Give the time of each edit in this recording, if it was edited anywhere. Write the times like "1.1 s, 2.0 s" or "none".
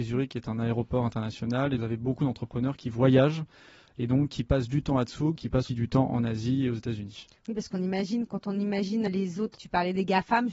1.8 s, 5.4 s, 5.7 s, 8.3 s, 9.1 s, 9.6 s